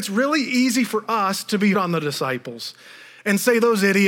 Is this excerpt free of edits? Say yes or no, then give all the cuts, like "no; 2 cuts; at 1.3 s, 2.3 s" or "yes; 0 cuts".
no; 1 cut; at 1.7 s